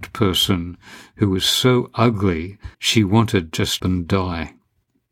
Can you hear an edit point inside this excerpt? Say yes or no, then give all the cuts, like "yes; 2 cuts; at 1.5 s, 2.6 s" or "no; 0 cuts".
yes; 2 cuts; at 2.7 s, 3.8 s